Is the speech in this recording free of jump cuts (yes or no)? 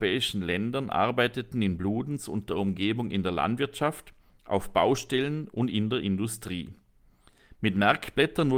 yes